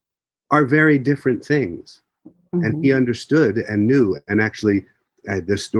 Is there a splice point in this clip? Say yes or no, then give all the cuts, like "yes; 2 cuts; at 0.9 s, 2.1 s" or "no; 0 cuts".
no; 0 cuts